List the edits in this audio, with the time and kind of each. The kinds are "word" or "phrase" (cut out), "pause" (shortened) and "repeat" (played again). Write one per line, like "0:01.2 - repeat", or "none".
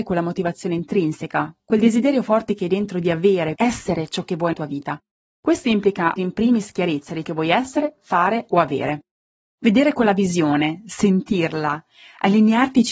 0:03.5 - word
0:04.5 - word
0:06.2 - word
0:07.2 - word